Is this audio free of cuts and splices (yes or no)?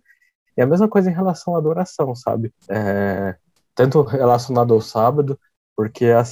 no